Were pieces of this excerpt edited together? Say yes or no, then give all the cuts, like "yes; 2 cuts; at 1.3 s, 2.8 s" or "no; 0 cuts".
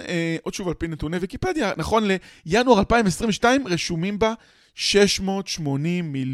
no; 0 cuts